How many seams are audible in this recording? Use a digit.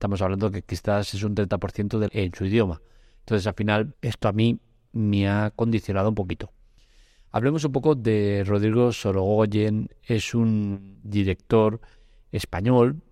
2